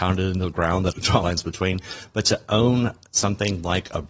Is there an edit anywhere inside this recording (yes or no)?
yes